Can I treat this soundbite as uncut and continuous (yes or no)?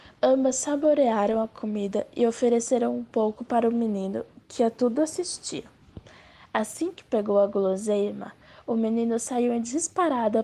yes